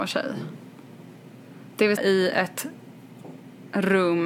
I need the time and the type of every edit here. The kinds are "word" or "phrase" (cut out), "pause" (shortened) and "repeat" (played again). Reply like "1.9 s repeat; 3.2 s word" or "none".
2.0 s word